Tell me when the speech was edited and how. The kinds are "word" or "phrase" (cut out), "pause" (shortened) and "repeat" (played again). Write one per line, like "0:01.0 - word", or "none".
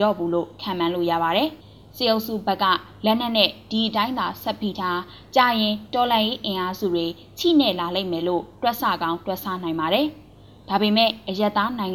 0:01.6 - pause

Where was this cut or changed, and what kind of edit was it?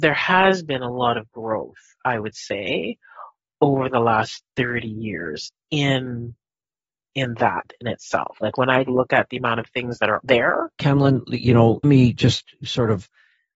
0:08.9 - word
0:10.7 - phrase
0:11.8 - word

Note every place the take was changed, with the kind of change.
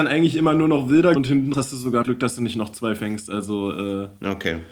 0:01.2 - word
0:01.5 - word
0:02.0 - word

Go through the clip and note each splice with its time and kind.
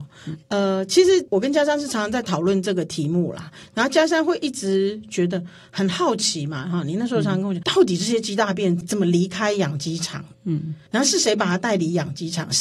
0:07.6 - word

